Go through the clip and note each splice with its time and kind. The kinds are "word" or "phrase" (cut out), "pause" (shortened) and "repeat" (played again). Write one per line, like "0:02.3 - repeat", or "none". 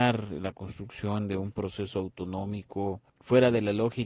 0:03.1 - pause